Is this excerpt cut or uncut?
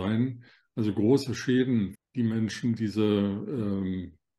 cut